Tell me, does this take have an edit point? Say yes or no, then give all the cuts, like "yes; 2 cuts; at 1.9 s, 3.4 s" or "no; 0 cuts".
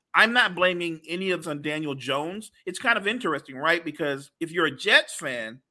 yes; 2 cuts; at 1.4 s, 4.3 s